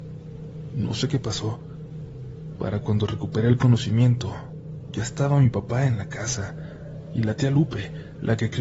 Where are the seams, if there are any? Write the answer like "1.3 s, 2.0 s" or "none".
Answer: none